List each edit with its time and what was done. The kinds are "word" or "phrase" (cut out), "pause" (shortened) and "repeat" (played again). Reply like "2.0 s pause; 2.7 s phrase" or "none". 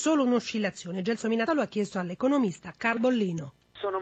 1.5 s word; 3.0 s word